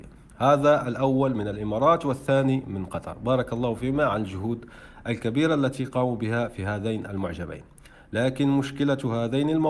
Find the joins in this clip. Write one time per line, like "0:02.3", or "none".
none